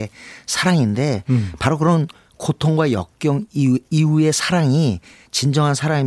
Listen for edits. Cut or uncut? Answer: uncut